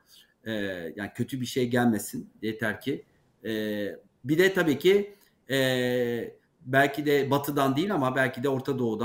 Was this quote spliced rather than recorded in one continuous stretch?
yes; 1 cut; at 4.1 s

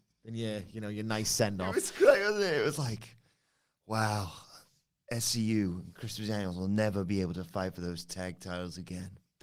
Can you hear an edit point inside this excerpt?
no; 0 cuts

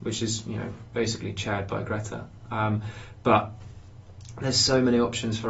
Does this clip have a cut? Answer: no; 0 cuts

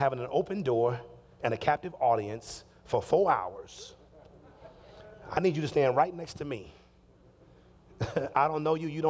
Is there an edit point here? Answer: no; 0 cuts

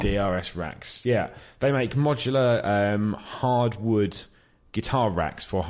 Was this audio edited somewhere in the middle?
no; 0 cuts

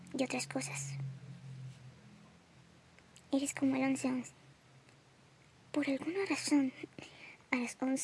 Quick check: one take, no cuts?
yes; 0 cuts

